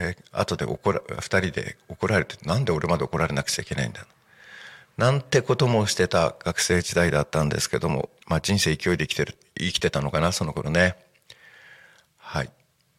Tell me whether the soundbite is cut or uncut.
cut